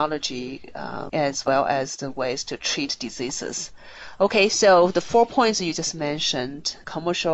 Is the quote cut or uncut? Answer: uncut